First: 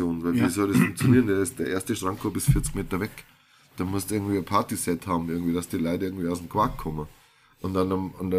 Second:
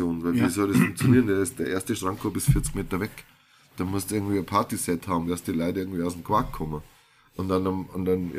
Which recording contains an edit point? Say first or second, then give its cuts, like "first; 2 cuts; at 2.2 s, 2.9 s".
second; 1 cut; at 5.3 s